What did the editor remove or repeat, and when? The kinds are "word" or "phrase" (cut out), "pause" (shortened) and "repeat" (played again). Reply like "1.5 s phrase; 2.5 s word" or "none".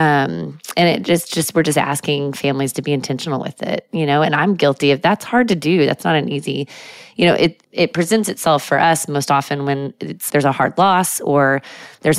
7.6 s word; 10.3 s word